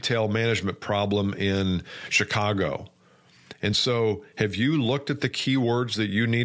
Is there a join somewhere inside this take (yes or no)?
no